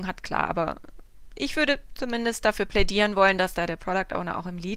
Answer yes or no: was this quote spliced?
no